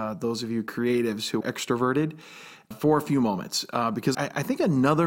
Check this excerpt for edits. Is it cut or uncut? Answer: cut